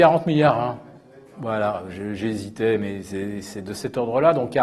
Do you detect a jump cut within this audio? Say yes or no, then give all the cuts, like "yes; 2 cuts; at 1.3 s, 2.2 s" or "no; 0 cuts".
no; 0 cuts